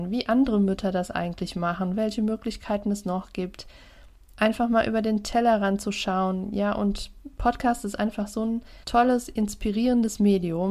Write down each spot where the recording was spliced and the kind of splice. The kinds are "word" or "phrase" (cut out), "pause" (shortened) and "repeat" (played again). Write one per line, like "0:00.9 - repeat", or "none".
0:08.8 - pause